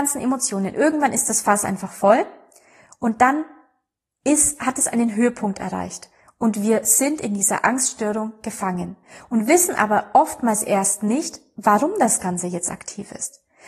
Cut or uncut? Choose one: uncut